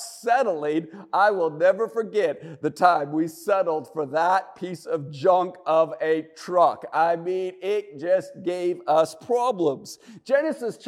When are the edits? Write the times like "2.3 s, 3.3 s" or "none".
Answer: none

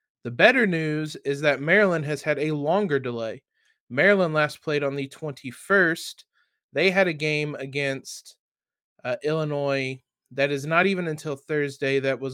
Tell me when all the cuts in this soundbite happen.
none

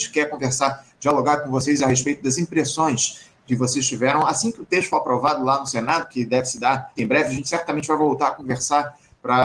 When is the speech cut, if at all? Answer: 7.0 s

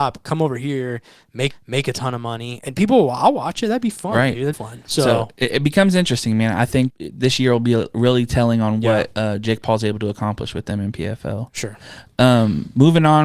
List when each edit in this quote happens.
1.5 s, 4.5 s, 6.9 s

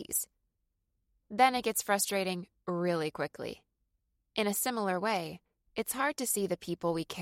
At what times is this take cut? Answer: none

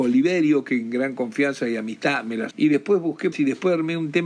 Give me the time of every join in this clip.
2.5 s, 3.3 s

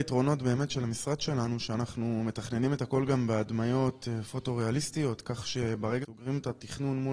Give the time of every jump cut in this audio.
6.0 s

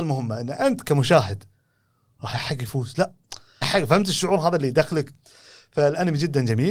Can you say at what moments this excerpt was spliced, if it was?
2.3 s, 3.6 s

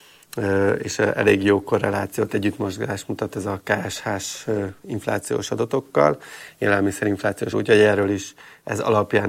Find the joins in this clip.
7.5 s

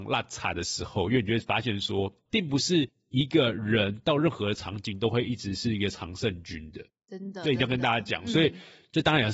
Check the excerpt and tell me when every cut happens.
2.2 s

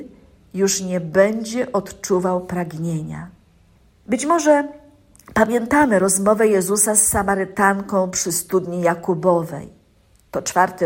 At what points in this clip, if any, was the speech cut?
3.8 s

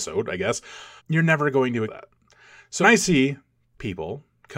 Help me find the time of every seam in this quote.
1.0 s, 1.8 s, 2.8 s

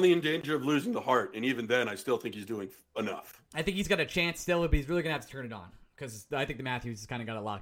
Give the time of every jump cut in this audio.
none

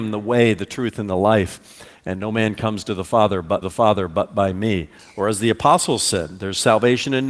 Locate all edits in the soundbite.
3.6 s

